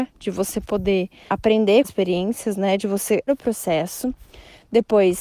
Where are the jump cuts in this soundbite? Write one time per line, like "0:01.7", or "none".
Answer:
0:01.3
0:01.8
0:03.3